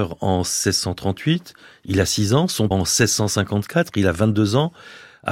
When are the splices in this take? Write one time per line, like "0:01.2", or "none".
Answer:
0:02.7